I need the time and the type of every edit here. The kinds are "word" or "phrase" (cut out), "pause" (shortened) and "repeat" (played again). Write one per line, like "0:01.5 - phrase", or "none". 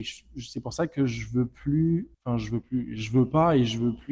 0:02.1 - pause